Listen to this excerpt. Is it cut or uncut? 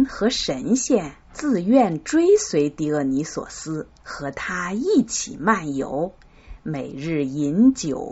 cut